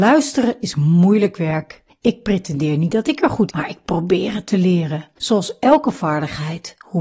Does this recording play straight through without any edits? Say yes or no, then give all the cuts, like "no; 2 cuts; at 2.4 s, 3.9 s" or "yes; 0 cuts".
no; 2 cuts; at 3.5 s, 5.1 s